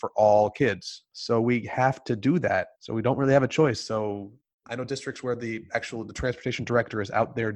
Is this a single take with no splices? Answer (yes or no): no